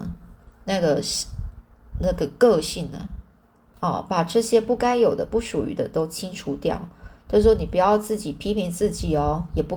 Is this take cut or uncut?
uncut